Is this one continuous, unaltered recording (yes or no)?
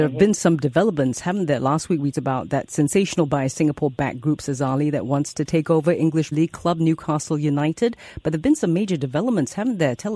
no